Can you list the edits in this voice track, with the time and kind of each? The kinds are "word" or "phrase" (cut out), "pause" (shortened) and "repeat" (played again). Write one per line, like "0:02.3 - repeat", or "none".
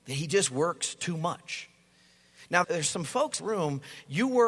0:02.6 - word
0:03.4 - phrase

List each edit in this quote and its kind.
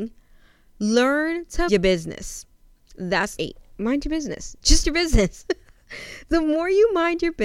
0:01.7 - word
0:03.4 - word
0:04.8 - word

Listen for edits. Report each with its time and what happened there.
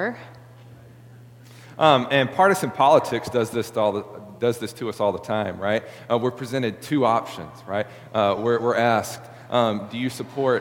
none

